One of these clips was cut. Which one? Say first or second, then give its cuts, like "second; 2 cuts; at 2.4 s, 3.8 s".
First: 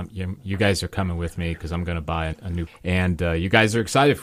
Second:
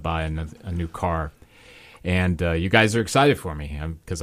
first; 2 cuts; at 2.3 s, 2.7 s